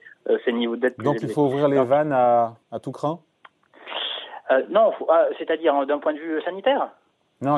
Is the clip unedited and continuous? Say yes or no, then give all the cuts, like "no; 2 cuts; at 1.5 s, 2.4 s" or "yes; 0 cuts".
no; 1 cut; at 2.6 s